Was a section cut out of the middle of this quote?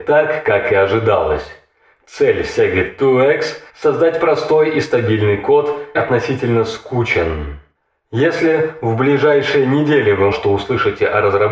yes; 3 cuts; at 3.7 s, 5.9 s, 10.3 s

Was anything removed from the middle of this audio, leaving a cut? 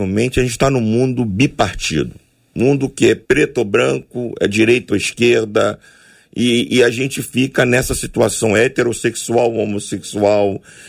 yes; 1 cut; at 3.2 s

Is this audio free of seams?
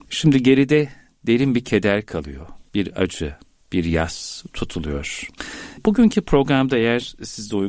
yes; 0 cuts

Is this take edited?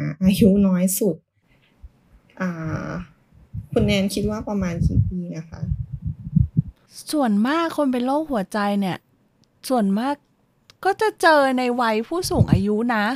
no; 0 cuts

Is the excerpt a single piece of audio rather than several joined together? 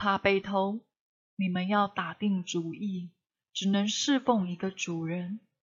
yes; 0 cuts

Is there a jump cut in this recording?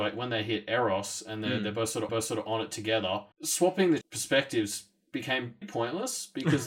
yes; 4 cuts; at 2.1 s, 3.3 s, 4.0 s, 5.6 s

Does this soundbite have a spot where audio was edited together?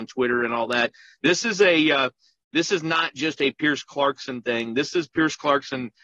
no; 0 cuts

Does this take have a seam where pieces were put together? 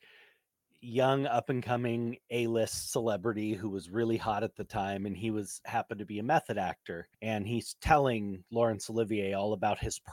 yes; 1 cut; at 7.1 s

